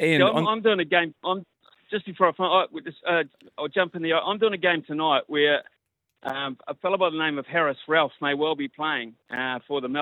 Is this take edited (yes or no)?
no